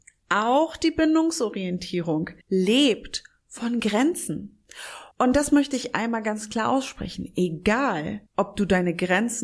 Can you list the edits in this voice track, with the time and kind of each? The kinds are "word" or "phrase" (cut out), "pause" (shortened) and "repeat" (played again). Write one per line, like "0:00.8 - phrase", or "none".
0:02.4 - pause
0:05.1 - pause
0:08.3 - pause